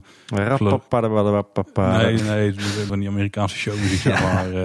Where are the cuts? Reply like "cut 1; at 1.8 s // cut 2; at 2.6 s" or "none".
cut 1; at 2.2 s // cut 2; at 2.9 s